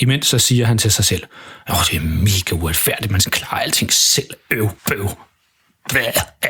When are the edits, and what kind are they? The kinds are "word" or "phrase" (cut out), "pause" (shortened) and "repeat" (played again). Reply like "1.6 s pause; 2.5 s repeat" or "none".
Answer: 3.3 s word; 4.8 s pause